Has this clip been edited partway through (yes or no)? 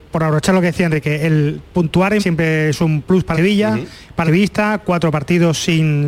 yes